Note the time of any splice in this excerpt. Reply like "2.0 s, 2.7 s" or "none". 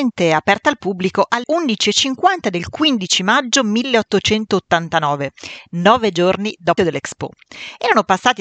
1.4 s, 6.8 s